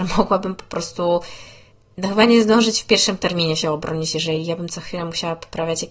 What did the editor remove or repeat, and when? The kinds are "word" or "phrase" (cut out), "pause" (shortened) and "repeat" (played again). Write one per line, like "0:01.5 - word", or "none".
0:01.7 - pause